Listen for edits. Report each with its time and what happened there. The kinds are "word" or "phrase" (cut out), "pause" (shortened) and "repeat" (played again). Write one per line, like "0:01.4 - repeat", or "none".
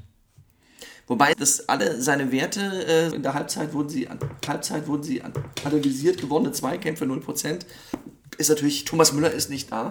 0:01.3 - phrase
0:03.1 - word
0:04.5 - repeat